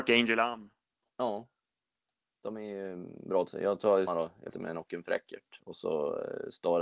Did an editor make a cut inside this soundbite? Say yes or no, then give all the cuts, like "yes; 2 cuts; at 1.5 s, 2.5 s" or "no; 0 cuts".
yes; 4 cuts; at 1.0 s, 3.5 s, 4.1 s, 4.5 s